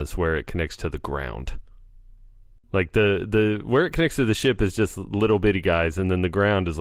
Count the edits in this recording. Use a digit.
0